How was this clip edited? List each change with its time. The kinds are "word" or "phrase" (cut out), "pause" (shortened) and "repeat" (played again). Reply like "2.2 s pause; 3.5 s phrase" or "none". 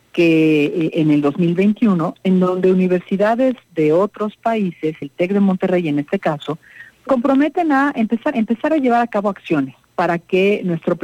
5.0 s word; 7.1 s word; 8.3 s repeat; 9.8 s pause